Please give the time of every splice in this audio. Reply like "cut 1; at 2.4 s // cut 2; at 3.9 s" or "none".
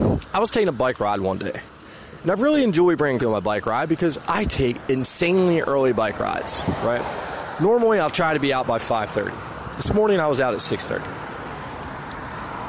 cut 1; at 3.2 s